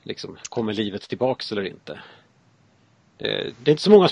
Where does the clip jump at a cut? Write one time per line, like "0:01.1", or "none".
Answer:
none